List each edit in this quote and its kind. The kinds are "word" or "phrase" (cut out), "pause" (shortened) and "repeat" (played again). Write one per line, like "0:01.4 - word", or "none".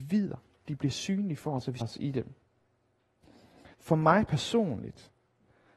0:01.8 - word
0:03.7 - pause